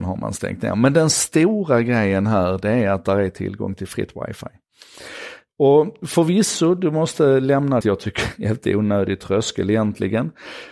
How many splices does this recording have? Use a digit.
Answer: 1